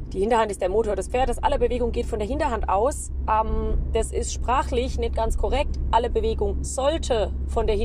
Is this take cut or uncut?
uncut